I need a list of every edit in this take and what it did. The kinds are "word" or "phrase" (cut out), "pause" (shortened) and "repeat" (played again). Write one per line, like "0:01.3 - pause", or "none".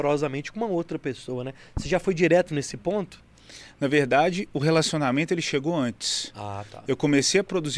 none